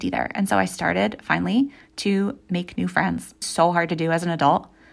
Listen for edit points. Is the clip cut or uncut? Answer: cut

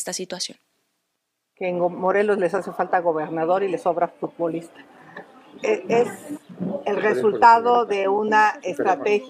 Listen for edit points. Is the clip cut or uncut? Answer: uncut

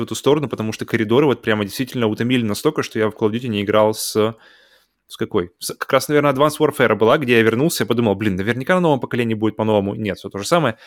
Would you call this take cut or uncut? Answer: uncut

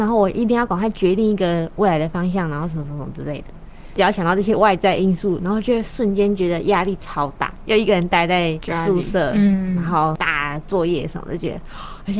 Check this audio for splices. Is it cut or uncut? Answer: uncut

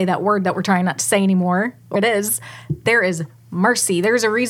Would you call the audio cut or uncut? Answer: cut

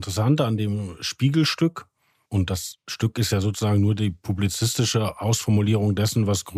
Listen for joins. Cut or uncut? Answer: uncut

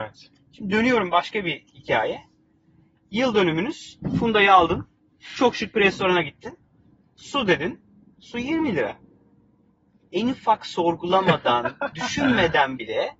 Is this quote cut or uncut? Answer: uncut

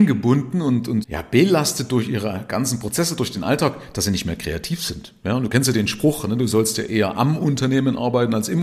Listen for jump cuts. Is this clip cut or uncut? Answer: cut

